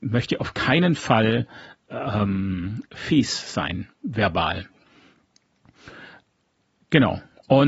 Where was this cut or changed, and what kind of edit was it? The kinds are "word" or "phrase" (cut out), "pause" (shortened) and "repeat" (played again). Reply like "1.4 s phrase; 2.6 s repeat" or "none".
none